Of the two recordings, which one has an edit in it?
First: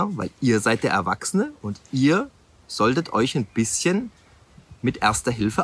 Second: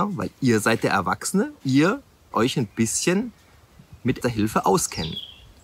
second; 3 cuts; at 1.6 s, 2.3 s, 4.2 s

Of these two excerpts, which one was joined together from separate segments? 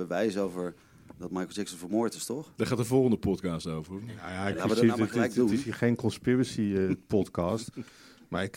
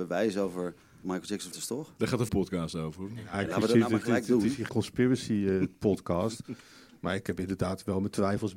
second; 5 cuts; at 1.0 s, 1.5 s, 2.3 s, 3.3 s, 4.7 s

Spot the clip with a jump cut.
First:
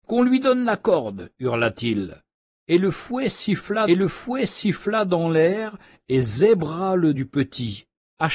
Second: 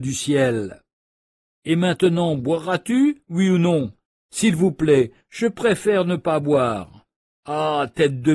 first; 2 cuts; at 3.9 s, 7.1 s

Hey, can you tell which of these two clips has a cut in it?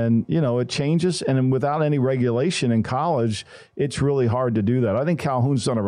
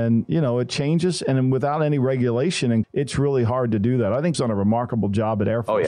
second; 2 cuts; at 2.8 s, 4.3 s

